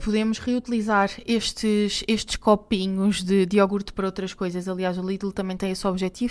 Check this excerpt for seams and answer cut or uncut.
uncut